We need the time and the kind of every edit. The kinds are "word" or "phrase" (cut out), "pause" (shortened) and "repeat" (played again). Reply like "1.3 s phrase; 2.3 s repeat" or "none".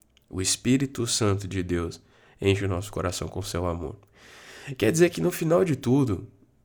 none